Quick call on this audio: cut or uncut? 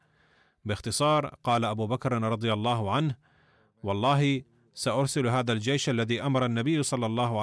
uncut